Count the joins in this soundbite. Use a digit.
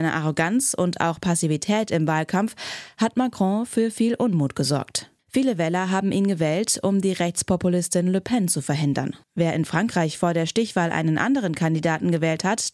2